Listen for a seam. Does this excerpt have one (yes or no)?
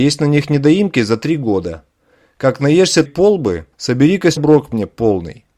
yes